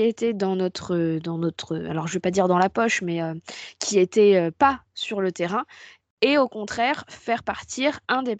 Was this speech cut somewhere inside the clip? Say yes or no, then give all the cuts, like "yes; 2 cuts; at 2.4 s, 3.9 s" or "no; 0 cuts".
no; 0 cuts